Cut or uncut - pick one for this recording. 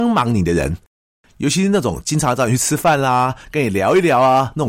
uncut